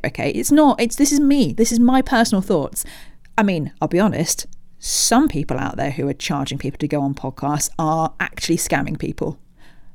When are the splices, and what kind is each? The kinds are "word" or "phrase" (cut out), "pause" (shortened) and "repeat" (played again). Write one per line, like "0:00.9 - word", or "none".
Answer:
none